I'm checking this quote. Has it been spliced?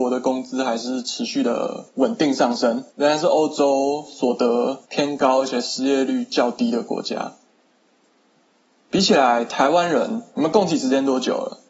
yes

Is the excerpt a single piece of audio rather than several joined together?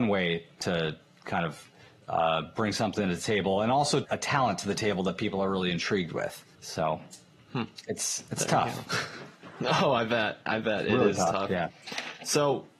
no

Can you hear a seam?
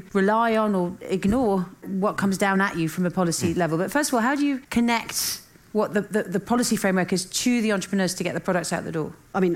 no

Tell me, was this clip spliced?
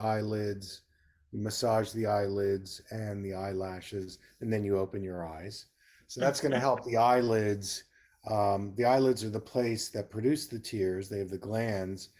no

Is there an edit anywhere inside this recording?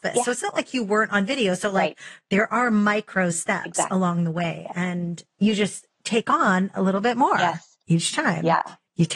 yes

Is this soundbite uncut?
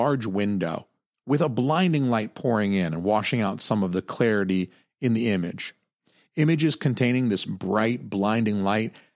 yes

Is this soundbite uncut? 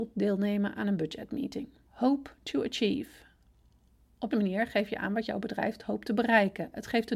no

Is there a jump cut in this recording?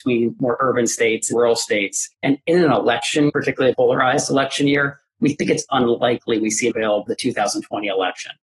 yes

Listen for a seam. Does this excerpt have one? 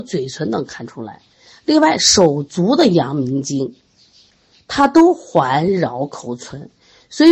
no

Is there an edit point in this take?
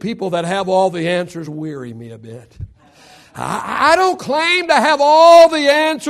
no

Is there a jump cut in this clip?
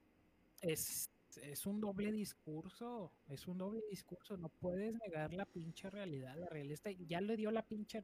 no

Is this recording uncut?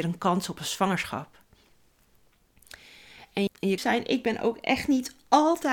no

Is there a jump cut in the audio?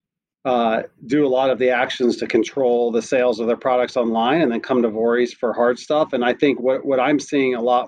no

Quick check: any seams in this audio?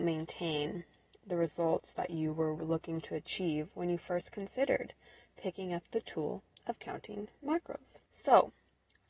no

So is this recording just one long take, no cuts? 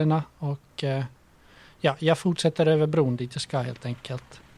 yes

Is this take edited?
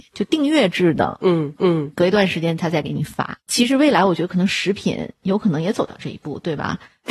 yes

